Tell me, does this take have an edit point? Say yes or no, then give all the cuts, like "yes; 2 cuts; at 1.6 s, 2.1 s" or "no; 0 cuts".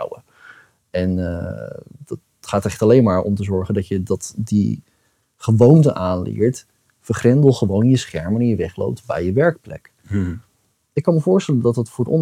no; 0 cuts